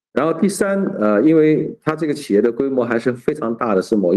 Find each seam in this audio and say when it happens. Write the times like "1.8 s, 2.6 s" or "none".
none